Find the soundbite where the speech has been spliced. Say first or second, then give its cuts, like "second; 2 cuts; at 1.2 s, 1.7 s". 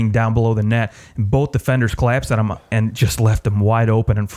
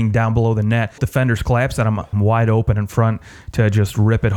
second; 2 cuts; at 1.0 s, 2.1 s